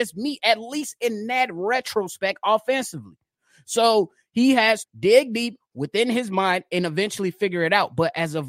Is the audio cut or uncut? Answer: cut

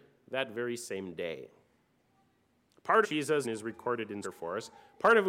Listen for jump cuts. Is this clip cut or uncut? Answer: cut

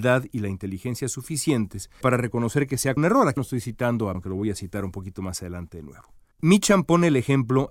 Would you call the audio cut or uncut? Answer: cut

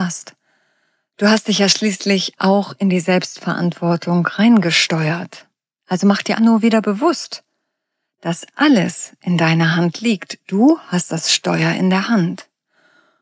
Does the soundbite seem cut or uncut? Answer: cut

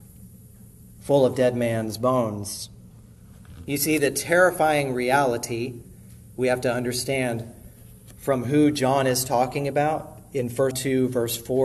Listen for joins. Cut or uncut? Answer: cut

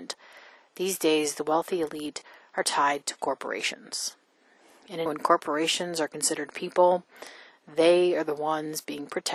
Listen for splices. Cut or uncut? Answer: cut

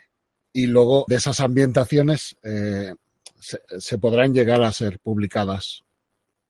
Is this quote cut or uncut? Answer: cut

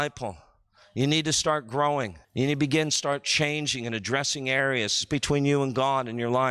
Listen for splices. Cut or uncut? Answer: cut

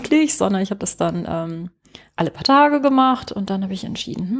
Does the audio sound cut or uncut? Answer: uncut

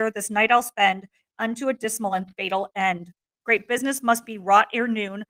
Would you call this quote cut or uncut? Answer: uncut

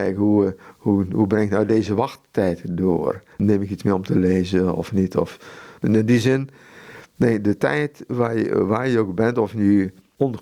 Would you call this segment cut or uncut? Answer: cut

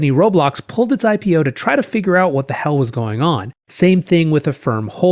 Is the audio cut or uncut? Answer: cut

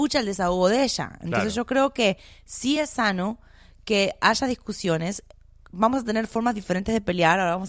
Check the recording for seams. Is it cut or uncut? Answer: uncut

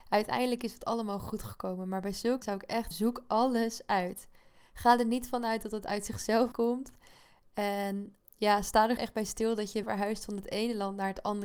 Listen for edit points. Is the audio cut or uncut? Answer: cut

